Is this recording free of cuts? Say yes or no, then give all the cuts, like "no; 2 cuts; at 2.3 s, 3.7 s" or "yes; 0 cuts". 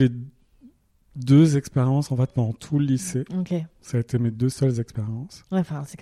yes; 0 cuts